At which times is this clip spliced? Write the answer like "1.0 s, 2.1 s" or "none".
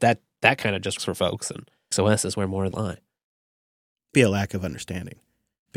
1.0 s, 1.9 s, 2.7 s, 4.1 s